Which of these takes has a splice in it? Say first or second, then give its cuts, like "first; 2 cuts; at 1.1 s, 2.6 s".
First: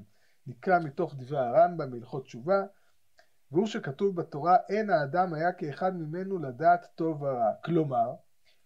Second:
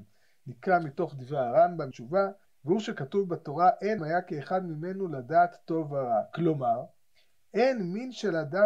second; 3 cuts; at 1.9 s, 2.5 s, 4.0 s